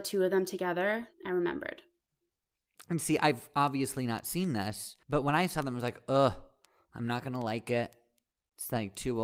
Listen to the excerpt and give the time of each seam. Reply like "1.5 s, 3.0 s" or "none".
1.1 s, 5.0 s